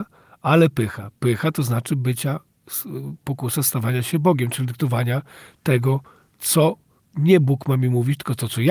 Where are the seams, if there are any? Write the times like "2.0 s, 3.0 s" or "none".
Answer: 7.0 s